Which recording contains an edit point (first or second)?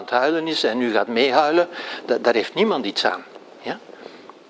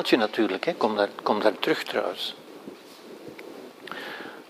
second